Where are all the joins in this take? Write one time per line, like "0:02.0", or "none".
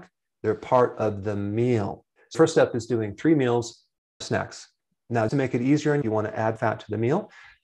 0:02.3
0:04.2
0:05.3
0:06.0
0:06.6